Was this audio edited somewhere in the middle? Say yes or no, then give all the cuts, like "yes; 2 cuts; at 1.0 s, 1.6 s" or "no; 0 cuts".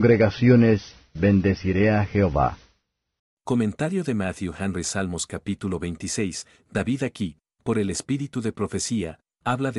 yes; 1 cut; at 3.2 s